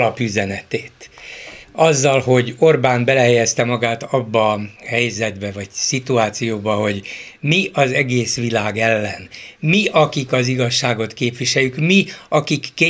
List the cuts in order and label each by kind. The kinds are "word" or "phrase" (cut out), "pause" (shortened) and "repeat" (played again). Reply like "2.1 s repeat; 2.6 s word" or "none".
1.6 s pause; 4.8 s pause